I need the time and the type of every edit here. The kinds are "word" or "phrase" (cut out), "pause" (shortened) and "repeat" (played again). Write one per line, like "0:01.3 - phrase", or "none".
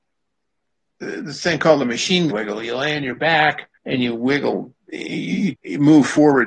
0:02.3 - word
0:03.8 - pause
0:04.8 - pause
0:05.5 - word